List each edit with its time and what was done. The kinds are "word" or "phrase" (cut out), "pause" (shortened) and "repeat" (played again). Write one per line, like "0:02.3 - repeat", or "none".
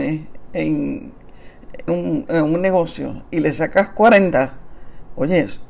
0:01.9 - word
0:02.3 - word